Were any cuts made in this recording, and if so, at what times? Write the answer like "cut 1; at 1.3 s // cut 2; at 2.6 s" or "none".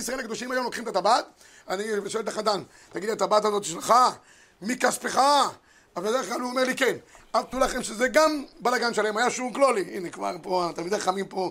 cut 1; at 7.5 s